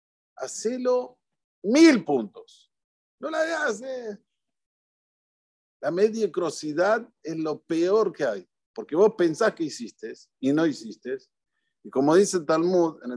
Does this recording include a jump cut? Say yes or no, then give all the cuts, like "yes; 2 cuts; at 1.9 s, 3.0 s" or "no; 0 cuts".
no; 0 cuts